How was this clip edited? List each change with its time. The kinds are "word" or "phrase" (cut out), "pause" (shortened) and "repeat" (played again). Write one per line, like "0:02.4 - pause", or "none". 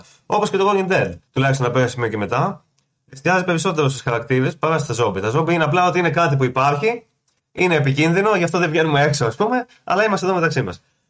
0:01.3 - pause